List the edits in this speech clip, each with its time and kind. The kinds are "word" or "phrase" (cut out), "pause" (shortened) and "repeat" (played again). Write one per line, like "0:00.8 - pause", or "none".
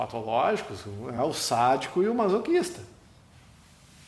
none